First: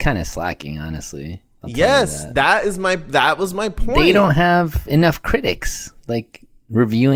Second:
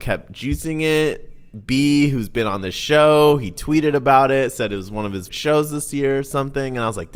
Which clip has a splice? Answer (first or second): second